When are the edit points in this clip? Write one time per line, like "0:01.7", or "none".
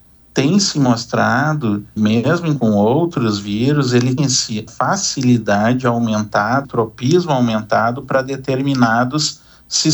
0:02.0
0:02.6
0:04.2
0:04.7
0:06.6